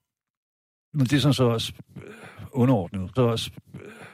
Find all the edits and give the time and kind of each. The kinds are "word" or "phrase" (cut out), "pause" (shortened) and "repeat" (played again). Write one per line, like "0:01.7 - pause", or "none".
0:03.2 - repeat